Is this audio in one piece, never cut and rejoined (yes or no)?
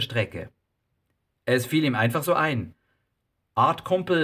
yes